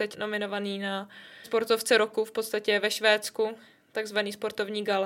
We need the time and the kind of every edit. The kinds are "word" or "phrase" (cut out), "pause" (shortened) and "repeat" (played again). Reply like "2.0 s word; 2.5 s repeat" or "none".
none